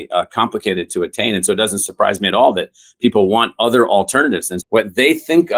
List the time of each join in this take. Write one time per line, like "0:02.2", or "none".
0:04.6